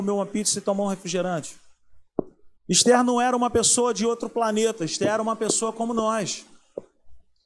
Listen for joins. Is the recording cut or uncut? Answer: cut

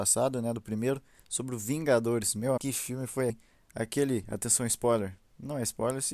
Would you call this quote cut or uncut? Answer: cut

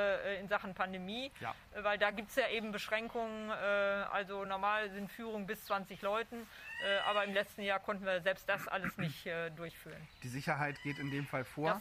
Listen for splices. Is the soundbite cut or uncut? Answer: uncut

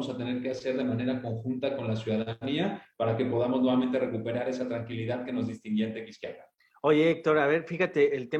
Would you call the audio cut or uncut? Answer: uncut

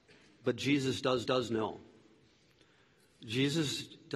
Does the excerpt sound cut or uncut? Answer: cut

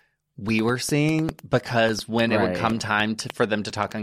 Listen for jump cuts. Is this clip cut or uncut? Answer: uncut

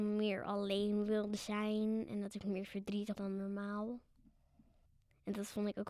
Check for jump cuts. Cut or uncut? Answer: cut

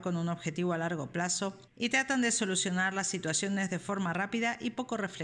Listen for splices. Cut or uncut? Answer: cut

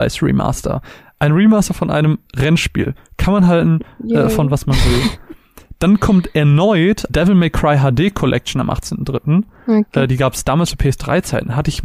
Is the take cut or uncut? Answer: cut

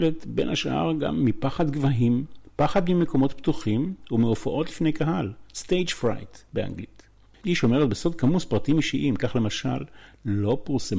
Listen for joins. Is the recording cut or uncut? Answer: uncut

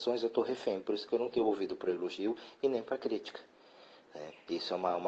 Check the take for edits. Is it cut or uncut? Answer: uncut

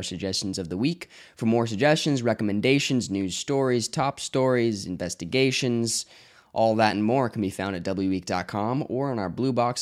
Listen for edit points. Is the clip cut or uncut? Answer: uncut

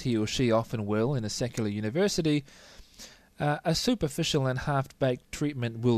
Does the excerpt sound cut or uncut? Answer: uncut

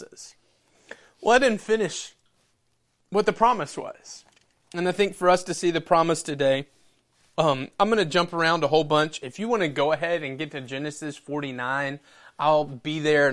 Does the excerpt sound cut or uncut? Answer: uncut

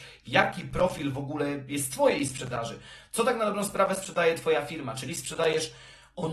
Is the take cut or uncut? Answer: cut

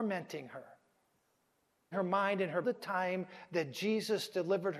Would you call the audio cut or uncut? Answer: cut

